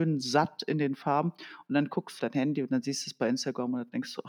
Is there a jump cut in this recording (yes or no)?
yes